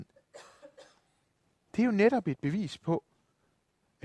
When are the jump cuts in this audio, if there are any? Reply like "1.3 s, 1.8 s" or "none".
none